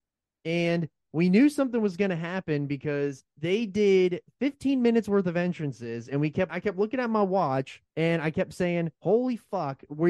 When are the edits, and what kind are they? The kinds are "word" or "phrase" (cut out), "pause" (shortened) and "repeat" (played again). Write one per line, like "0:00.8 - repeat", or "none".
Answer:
0:03.3 - pause
0:06.5 - word
0:07.9 - pause
0:08.9 - pause